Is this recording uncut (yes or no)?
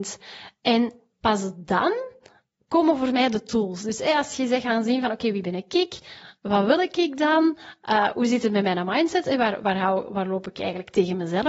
yes